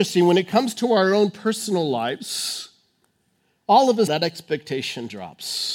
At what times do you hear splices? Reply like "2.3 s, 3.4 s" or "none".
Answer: 4.1 s